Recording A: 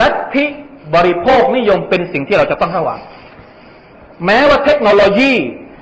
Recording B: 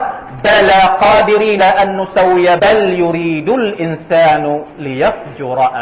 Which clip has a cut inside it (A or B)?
B